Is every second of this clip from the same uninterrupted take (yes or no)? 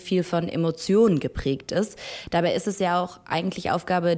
yes